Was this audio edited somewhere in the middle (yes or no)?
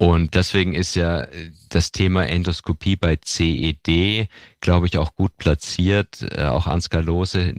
no